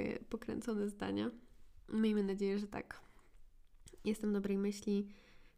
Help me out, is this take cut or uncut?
uncut